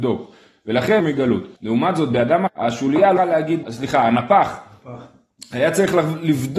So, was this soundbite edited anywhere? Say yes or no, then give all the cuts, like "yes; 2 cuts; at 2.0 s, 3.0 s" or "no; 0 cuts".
yes; 5 cuts; at 1.0 s, 1.6 s, 2.5 s, 3.2 s, 3.6 s